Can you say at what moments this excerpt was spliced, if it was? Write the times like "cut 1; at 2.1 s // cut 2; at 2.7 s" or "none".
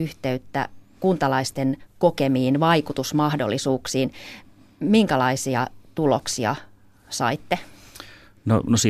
none